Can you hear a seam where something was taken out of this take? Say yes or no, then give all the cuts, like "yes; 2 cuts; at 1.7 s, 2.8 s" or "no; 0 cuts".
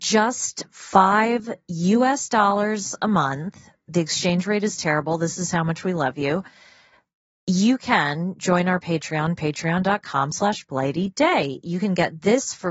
no; 0 cuts